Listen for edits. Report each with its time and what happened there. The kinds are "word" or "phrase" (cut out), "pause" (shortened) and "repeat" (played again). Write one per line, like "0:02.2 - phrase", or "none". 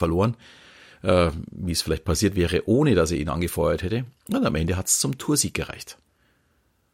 none